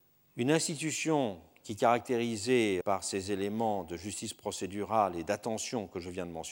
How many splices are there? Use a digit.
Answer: 1